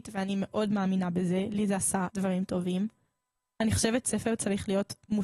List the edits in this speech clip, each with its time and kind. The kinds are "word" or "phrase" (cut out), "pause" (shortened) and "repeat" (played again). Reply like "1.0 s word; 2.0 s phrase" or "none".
2.1 s word; 4.0 s word